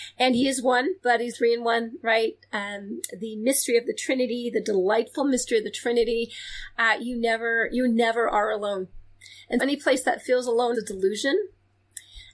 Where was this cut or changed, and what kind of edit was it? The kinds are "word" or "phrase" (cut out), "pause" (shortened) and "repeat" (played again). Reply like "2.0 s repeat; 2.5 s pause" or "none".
1.0 s pause; 1.3 s word; 9.6 s word; 10.7 s word